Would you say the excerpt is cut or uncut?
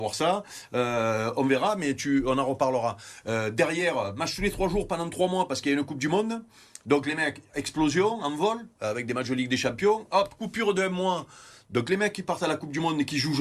uncut